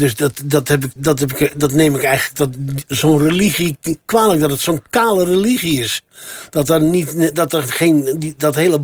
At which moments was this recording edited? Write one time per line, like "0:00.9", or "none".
0:01.0
0:04.0